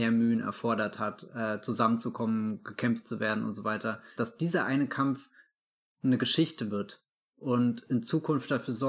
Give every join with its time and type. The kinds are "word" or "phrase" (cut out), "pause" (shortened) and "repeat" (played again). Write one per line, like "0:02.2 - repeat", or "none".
0:04.2 - word